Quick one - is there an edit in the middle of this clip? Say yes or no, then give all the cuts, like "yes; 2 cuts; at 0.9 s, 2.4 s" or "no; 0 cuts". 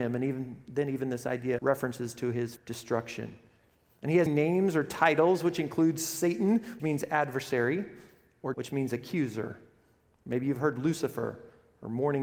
yes; 5 cuts; at 1.6 s, 2.6 s, 4.3 s, 6.8 s, 8.5 s